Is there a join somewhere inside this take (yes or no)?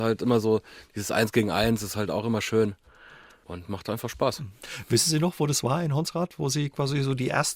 no